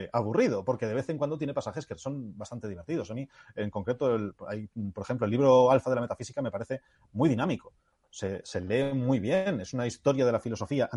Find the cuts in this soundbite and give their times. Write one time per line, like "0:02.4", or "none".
none